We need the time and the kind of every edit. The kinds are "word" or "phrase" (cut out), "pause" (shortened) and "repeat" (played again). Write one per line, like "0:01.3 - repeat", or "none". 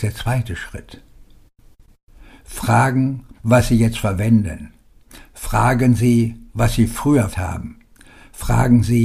0:03.4 - pause
0:06.5 - pause
0:07.3 - word